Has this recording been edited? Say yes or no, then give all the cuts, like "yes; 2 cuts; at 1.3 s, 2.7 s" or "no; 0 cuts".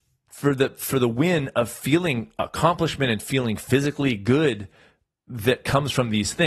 no; 0 cuts